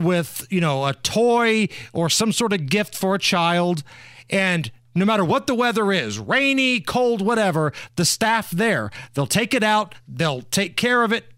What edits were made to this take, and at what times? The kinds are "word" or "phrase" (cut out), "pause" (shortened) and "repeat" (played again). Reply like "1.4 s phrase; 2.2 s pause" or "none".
none

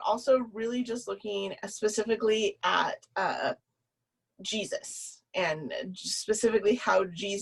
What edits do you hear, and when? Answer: none

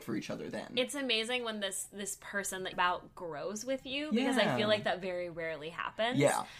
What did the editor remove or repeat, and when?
2.7 s phrase

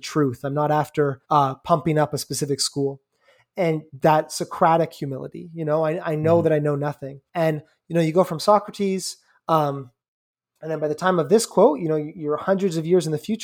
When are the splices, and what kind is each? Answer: 1.2 s pause; 7.3 s pause

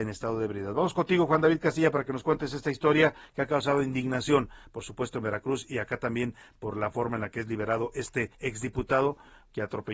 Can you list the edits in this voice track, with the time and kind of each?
8.3 s pause

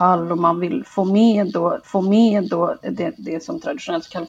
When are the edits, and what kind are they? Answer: 1.8 s repeat

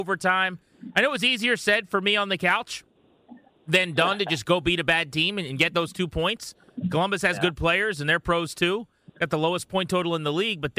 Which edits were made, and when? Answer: none

